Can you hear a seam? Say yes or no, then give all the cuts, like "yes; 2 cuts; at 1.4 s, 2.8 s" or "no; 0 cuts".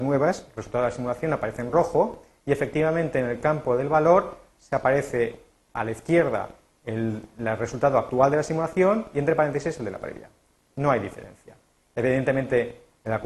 no; 0 cuts